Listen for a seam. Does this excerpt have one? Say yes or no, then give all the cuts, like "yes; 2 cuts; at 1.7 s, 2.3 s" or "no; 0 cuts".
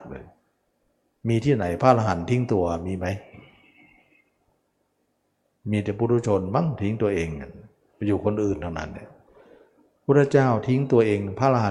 no; 0 cuts